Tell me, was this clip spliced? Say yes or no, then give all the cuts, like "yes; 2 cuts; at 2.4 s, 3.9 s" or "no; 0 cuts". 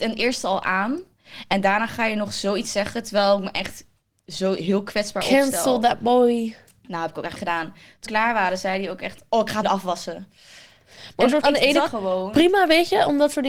yes; 5 cuts; at 7.4 s, 8.1 s, 9.6 s, 11.4 s, 11.9 s